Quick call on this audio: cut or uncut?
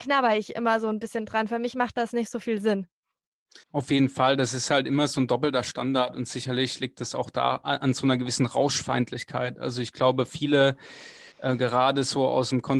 cut